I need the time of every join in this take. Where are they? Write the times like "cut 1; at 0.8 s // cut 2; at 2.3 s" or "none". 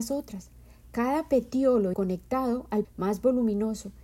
cut 1; at 1.9 s // cut 2; at 2.8 s